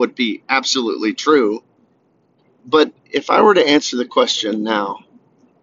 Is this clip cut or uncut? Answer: uncut